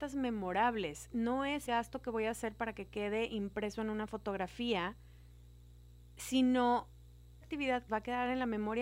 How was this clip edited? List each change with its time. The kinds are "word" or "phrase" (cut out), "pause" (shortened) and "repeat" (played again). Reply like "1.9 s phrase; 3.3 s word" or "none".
1.7 s word; 7.4 s word; 7.9 s phrase